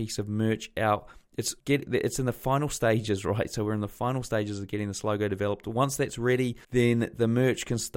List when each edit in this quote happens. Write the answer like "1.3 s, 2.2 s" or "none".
1.6 s, 6.6 s